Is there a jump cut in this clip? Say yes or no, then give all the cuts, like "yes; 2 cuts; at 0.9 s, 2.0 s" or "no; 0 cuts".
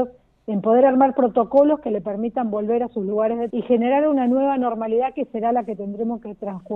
yes; 1 cut; at 3.5 s